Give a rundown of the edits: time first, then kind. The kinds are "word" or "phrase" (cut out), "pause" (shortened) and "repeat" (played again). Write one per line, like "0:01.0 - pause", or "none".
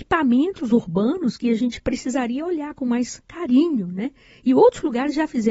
none